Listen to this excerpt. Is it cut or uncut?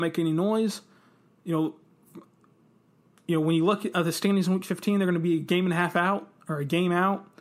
uncut